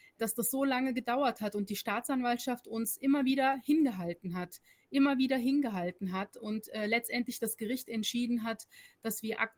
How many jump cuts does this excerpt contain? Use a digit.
0